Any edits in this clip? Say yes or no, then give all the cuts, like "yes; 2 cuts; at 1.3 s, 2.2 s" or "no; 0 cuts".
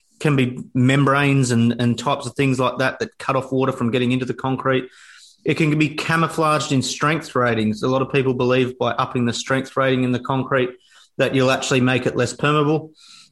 no; 0 cuts